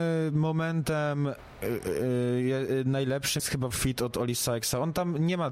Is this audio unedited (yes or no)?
no